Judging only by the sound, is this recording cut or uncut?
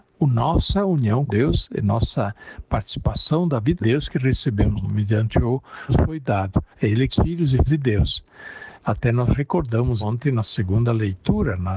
cut